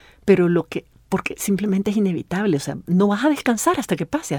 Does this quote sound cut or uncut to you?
uncut